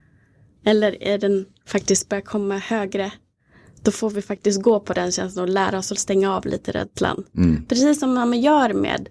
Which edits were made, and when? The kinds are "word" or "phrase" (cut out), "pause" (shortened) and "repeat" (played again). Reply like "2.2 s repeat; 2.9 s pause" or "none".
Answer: none